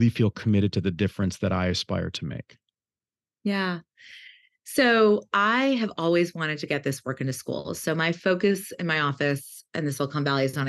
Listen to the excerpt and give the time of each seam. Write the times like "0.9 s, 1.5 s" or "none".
none